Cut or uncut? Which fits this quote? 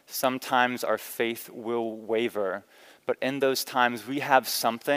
uncut